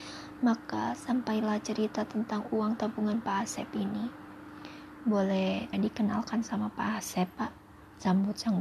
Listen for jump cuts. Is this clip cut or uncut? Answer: cut